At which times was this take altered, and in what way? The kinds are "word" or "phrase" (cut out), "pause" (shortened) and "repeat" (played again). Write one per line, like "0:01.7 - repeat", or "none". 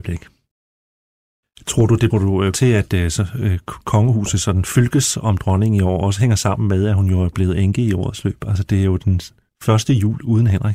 0:02.1 - phrase
0:02.5 - word